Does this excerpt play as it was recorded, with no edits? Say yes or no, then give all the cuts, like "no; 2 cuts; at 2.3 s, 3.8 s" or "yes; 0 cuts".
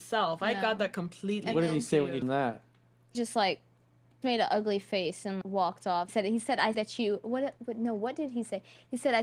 no; 6 cuts; at 2.2 s, 3.1 s, 4.2 s, 5.4 s, 6.1 s, 6.7 s